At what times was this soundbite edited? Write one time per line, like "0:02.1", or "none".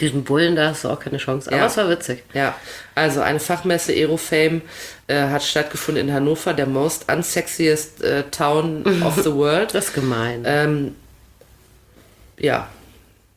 none